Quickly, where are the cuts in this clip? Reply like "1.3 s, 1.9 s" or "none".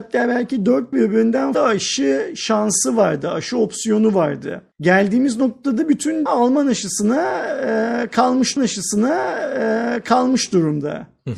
0.9 s, 1.5 s, 4.7 s, 6.3 s, 8.6 s